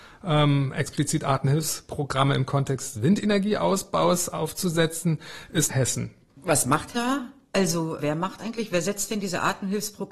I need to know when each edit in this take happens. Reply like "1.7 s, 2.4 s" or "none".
2.9 s, 5.7 s, 6.2 s, 6.9 s, 8.0 s, 8.4 s